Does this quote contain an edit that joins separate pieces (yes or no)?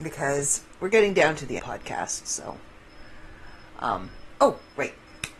yes